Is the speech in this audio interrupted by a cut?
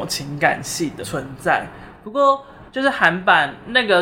yes; 1 cut; at 1.0 s

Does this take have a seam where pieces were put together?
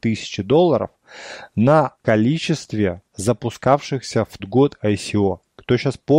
yes; 3 cuts; at 2.0 s, 3.1 s, 4.4 s

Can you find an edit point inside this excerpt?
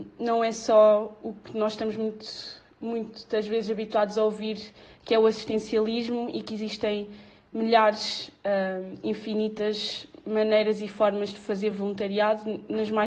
no; 0 cuts

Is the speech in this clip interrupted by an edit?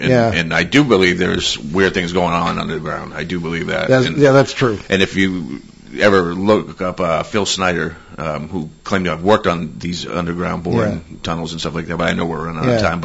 no; 0 cuts

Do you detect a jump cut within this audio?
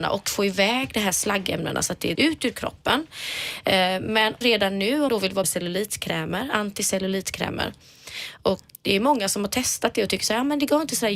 yes; 5 cuts; at 2.2 s, 4.4 s, 5.1 s, 5.4 s, 8.7 s

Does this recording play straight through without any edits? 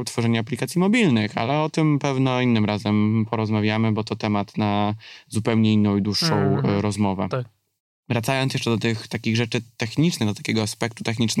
yes; 0 cuts

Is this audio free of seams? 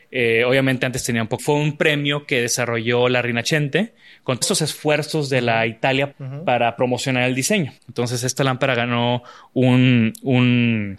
no; 4 cuts; at 1.4 s, 4.4 s, 6.1 s, 7.8 s

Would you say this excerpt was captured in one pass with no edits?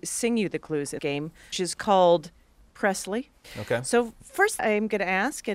no; 4 cuts; at 1.0 s, 1.5 s, 2.7 s, 4.6 s

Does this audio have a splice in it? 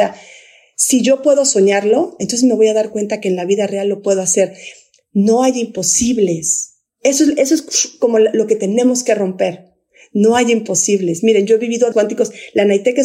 yes; 1 cut; at 11.9 s

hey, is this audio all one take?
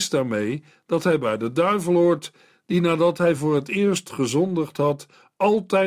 yes; 0 cuts

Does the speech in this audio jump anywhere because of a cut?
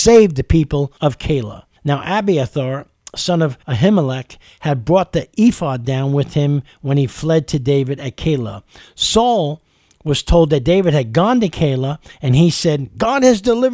yes; 3 cuts; at 1.0 s, 1.8 s, 3.6 s

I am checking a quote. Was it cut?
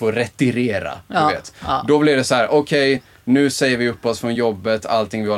no; 0 cuts

